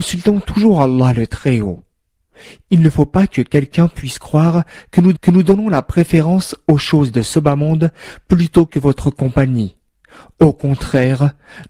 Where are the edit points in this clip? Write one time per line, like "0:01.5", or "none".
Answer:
0:05.2